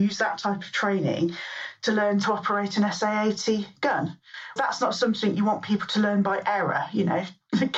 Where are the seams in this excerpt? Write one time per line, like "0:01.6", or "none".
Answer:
0:04.6

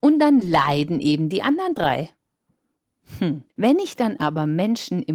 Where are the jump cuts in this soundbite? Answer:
0:03.5

